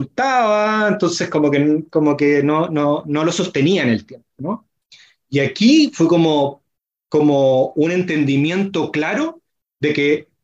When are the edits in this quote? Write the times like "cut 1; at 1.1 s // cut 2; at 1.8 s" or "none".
none